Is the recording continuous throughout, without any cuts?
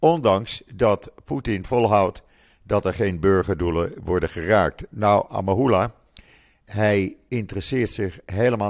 yes; 0 cuts

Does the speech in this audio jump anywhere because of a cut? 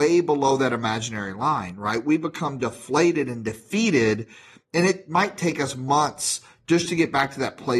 no; 0 cuts

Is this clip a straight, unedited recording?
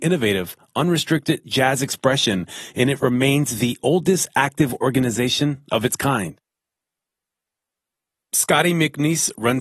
yes; 0 cuts

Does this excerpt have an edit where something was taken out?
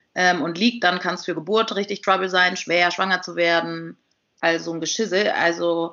no; 0 cuts

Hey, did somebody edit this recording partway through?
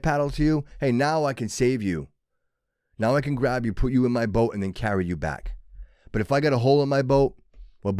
no; 0 cuts

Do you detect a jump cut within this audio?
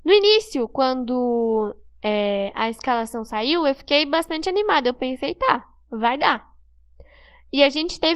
no; 0 cuts

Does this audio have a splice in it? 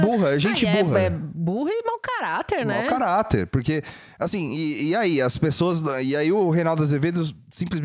no; 0 cuts

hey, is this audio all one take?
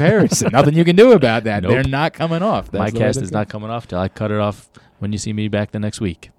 yes; 0 cuts

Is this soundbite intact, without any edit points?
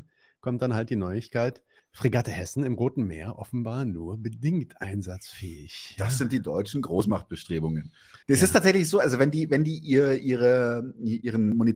no; 2 cuts; at 1.8 s, 8.2 s

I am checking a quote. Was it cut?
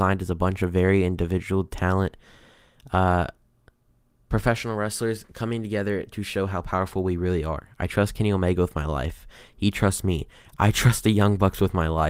no; 0 cuts

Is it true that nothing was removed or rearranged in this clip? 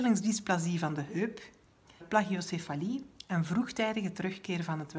no; 1 cut; at 2.0 s

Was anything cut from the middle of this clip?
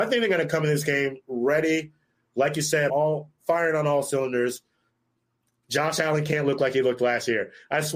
yes; 1 cut; at 2.9 s

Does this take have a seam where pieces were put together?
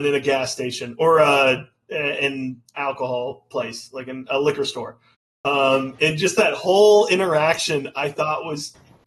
no; 0 cuts

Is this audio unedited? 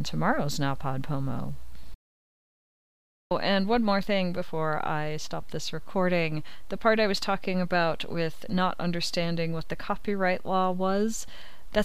yes; 0 cuts

